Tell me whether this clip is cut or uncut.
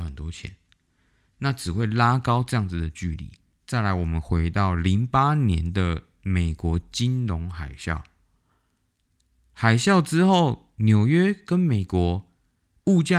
uncut